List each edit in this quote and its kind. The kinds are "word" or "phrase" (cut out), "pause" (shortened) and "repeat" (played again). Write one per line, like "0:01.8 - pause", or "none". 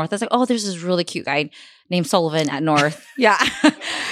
none